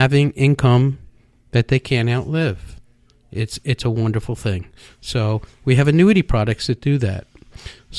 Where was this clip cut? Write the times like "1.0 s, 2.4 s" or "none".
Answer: none